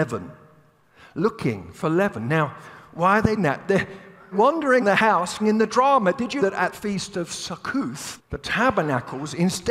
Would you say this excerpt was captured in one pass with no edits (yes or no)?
no